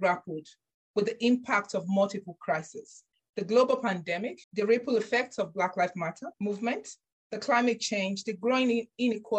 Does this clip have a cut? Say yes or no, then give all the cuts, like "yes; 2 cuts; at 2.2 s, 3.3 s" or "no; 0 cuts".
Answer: yes; 3 cuts; at 3.1 s, 4.4 s, 6.3 s